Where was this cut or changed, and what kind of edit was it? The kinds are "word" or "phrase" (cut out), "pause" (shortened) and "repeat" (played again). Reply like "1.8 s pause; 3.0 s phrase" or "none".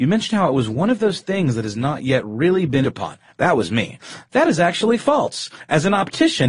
2.8 s word